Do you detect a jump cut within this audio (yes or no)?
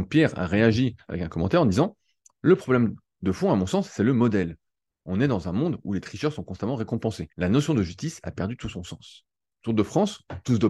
yes